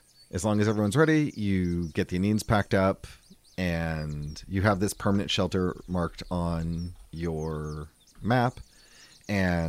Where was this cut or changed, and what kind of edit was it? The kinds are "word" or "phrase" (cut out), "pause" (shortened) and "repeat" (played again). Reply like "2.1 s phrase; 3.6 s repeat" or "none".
7.1 s pause